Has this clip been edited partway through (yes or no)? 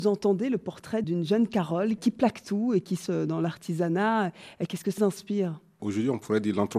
yes